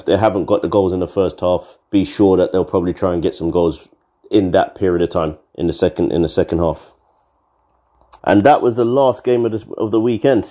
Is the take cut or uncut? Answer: cut